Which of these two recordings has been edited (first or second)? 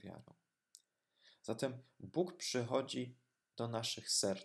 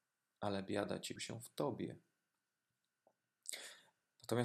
second